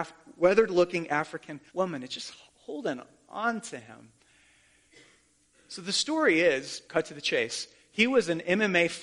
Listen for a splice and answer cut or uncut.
cut